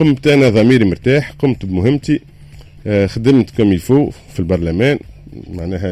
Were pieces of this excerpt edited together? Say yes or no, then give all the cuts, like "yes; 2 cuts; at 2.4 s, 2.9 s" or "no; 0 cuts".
no; 0 cuts